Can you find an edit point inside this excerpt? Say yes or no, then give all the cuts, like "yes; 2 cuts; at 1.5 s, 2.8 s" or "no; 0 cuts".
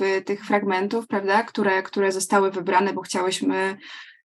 no; 0 cuts